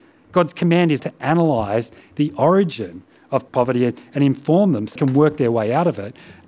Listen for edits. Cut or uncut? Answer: cut